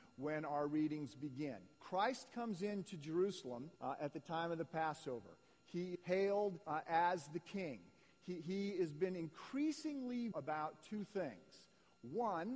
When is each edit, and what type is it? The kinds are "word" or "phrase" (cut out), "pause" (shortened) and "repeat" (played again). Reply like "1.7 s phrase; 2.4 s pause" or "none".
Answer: 1.7 s pause; 3.8 s pause; 5.9 s word; 6.6 s pause; 10.3 s word